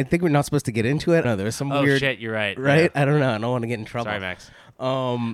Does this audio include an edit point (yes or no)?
yes